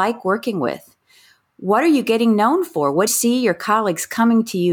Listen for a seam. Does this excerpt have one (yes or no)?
yes